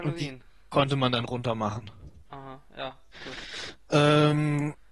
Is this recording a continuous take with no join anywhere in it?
no; 1 cut; at 2.3 s

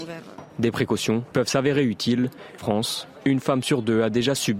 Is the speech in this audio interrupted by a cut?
yes; 2 cuts; at 1.3 s, 2.6 s

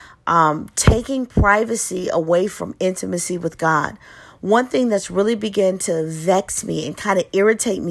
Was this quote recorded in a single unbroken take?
yes; 0 cuts

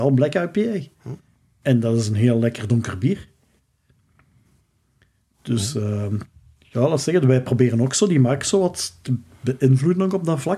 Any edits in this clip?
no; 0 cuts

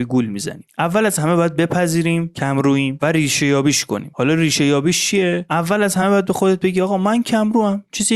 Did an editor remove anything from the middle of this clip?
no; 0 cuts

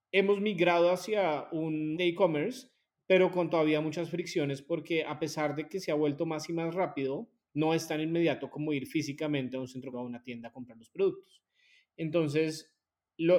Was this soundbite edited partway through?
yes; 2 cuts; at 2.0 s, 9.9 s

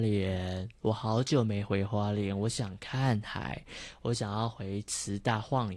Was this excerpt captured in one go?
yes; 0 cuts

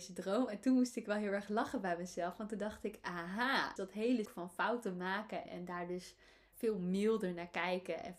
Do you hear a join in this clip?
yes; 4 cuts; at 3.8 s, 4.2 s, 5.4 s, 6.5 s

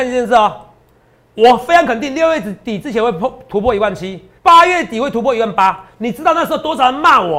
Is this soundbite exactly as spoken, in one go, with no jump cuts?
no; 1 cut; at 4.4 s

